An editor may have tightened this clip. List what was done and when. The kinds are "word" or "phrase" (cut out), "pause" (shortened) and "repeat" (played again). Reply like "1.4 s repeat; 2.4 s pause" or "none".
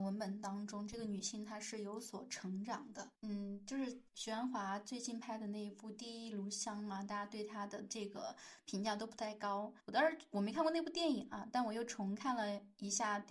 3.1 s pause; 4.1 s pause; 9.8 s pause